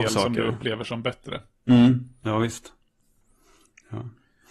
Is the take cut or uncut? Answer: uncut